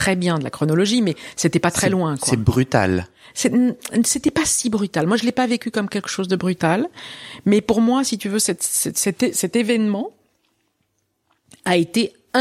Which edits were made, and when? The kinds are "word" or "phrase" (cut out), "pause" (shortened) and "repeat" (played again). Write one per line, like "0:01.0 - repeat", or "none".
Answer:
none